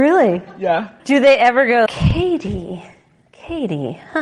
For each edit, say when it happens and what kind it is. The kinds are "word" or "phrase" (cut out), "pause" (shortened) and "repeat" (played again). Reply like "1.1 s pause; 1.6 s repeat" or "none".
1.0 s pause; 1.9 s word